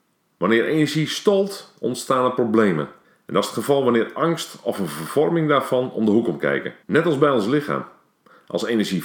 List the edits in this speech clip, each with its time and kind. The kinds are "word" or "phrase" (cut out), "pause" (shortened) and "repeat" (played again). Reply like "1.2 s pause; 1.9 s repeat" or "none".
3.0 s pause; 6.8 s pause